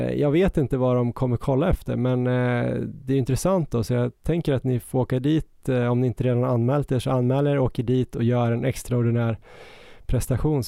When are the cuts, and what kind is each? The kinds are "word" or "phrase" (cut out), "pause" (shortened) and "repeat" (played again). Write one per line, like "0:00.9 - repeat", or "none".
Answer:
none